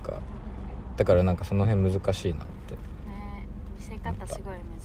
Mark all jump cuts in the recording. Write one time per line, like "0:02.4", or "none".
none